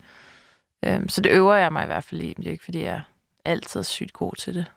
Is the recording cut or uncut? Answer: uncut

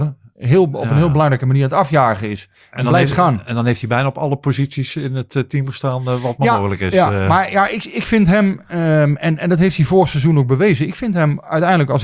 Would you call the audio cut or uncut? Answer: uncut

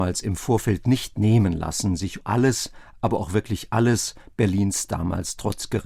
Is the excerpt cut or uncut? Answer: cut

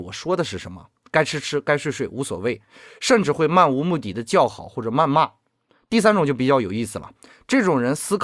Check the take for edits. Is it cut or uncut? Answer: uncut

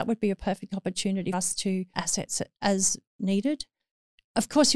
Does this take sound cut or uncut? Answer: cut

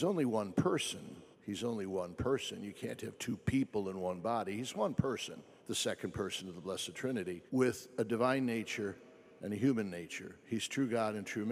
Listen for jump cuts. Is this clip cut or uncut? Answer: cut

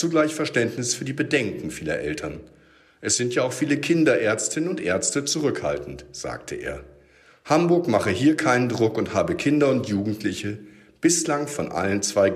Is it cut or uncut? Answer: uncut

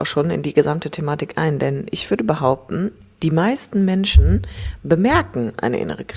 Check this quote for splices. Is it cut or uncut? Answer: uncut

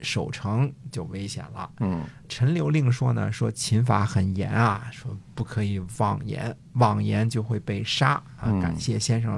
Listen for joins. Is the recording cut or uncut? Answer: cut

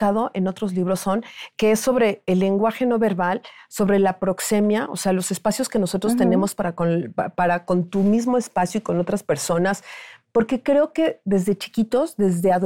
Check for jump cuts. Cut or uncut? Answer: uncut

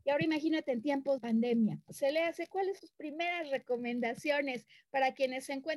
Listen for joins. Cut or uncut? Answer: cut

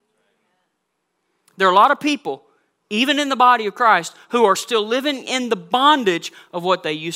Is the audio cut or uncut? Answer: uncut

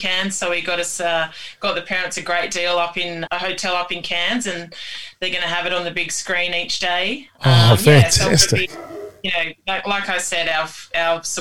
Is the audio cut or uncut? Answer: cut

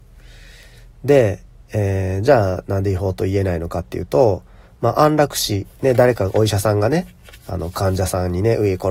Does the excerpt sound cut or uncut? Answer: uncut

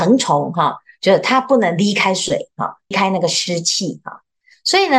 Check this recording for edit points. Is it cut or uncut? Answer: cut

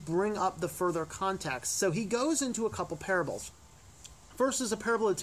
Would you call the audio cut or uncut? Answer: uncut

